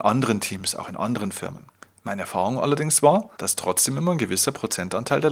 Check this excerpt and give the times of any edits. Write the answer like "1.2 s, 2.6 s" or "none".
1.7 s, 3.3 s